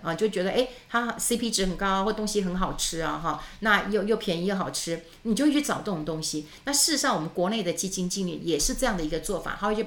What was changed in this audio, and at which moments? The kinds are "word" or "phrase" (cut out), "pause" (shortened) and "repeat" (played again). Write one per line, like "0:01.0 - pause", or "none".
none